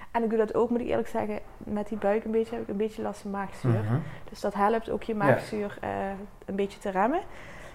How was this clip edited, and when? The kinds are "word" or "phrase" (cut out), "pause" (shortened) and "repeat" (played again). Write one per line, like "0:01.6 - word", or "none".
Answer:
none